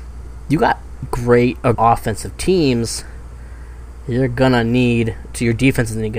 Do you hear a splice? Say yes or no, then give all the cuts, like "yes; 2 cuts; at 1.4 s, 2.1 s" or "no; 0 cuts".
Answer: yes; 2 cuts; at 1.0 s, 1.7 s